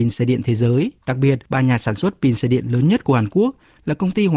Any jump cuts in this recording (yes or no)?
yes